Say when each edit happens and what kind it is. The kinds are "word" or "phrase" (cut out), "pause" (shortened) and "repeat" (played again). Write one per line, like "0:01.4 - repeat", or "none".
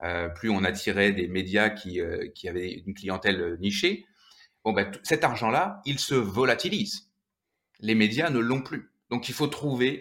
0:02.3 - word